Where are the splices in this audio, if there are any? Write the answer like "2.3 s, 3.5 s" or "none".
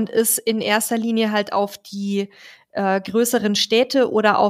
none